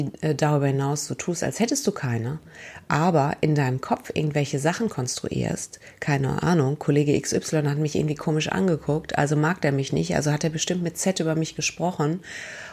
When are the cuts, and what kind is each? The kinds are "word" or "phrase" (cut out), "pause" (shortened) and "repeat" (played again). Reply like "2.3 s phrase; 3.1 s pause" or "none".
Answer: none